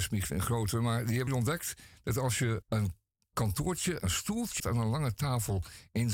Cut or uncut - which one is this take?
cut